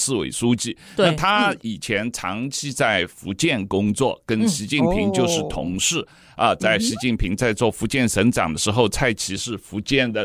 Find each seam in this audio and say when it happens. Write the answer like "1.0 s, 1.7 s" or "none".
none